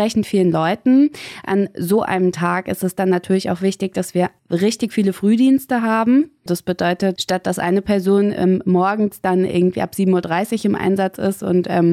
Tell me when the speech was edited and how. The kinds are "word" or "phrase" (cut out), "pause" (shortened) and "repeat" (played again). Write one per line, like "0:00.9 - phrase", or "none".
0:04.4 - pause